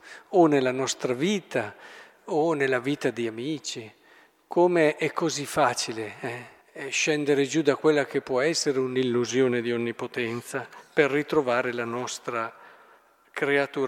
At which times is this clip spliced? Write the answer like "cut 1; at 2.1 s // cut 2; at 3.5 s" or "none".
cut 1; at 6.6 s